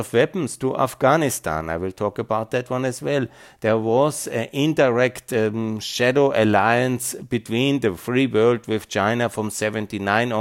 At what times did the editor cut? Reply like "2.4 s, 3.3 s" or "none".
none